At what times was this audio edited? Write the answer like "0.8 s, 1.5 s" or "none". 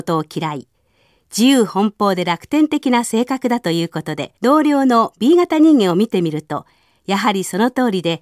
4.4 s